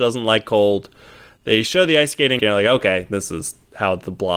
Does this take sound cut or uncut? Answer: cut